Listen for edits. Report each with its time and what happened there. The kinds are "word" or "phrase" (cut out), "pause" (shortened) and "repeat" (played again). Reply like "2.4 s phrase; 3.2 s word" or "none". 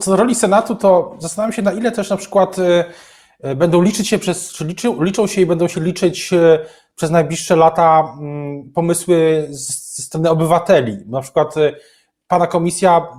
none